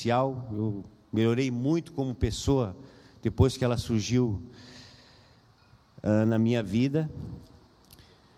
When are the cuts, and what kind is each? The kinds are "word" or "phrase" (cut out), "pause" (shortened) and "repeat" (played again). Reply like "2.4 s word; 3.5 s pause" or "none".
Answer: none